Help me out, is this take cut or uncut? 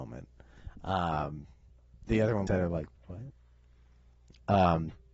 cut